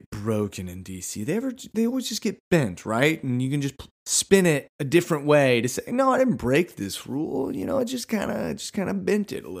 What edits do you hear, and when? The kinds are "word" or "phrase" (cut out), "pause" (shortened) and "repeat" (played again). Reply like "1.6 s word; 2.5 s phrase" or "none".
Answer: 3.9 s pause; 4.7 s pause